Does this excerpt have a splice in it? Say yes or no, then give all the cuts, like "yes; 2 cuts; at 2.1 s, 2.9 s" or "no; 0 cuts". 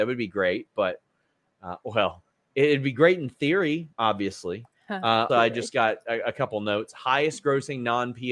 yes; 2 cuts; at 3.9 s, 5.3 s